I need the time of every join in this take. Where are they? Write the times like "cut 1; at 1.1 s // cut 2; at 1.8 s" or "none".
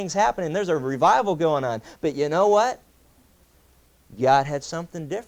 none